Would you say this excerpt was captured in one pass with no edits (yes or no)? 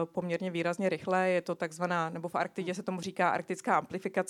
yes